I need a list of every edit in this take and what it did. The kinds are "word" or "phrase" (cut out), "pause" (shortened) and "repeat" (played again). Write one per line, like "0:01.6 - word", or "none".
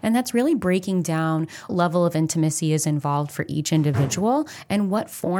0:01.7 - word